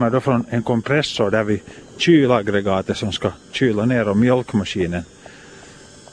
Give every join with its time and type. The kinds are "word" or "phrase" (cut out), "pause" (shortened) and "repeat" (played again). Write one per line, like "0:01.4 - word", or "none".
none